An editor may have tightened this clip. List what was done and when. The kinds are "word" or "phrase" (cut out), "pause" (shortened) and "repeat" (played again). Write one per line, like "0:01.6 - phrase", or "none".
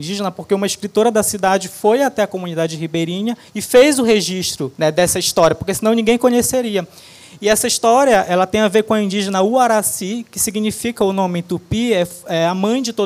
0:03.5 - pause
0:04.7 - pause